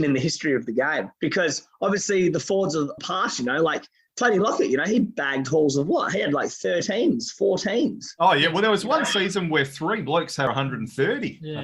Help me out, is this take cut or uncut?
cut